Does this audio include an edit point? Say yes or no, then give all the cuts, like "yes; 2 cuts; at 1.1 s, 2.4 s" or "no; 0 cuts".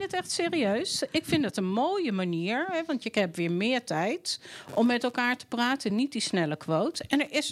no; 0 cuts